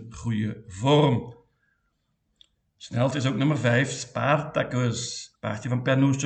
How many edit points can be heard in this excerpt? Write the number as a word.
two